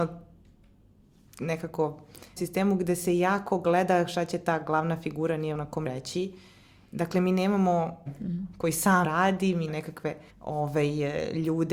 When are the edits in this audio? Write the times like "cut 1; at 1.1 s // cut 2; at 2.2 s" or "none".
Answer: cut 1; at 2.4 s // cut 2; at 5.5 s // cut 3; at 5.8 s // cut 4; at 8.1 s // cut 5; at 9.0 s // cut 6; at 9.7 s // cut 7; at 10.3 s